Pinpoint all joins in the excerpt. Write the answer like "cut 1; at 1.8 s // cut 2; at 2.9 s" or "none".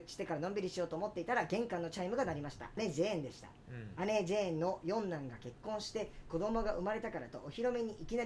cut 1; at 2.8 s